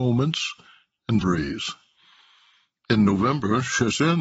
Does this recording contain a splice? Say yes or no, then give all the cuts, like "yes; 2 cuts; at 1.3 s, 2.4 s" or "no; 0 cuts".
yes; 1 cut; at 1.2 s